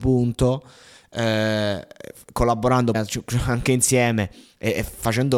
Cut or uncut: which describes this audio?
cut